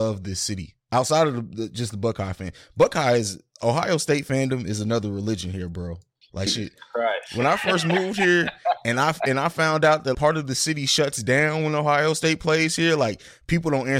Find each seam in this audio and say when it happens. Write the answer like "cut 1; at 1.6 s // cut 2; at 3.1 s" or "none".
cut 1; at 6.5 s // cut 2; at 10.1 s